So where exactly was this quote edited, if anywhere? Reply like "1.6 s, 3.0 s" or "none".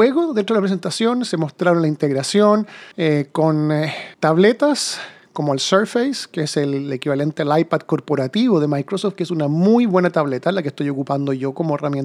2.9 s, 4.1 s